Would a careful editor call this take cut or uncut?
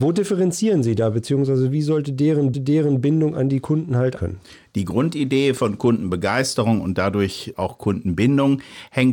cut